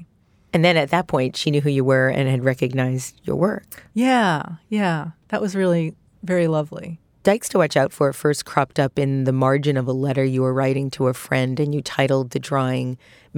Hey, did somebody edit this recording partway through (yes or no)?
no